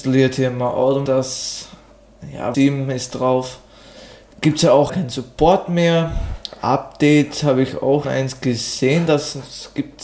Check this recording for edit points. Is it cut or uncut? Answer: cut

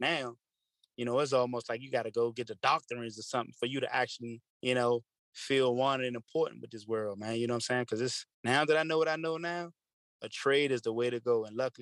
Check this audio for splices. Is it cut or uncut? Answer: cut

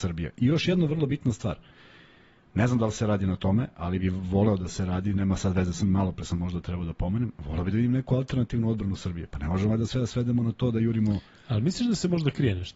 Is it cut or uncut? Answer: cut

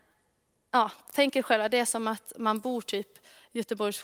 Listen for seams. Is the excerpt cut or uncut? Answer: uncut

